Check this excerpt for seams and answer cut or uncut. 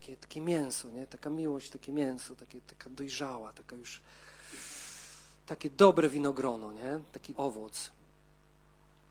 cut